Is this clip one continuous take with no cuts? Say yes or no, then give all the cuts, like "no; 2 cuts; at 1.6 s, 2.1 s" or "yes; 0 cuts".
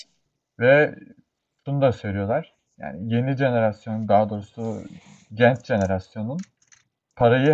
yes; 0 cuts